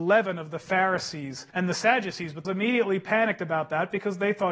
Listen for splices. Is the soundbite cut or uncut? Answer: cut